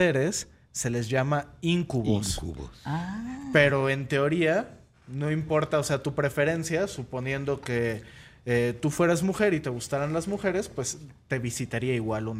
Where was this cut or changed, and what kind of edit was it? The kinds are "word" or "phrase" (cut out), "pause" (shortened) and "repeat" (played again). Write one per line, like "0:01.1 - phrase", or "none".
none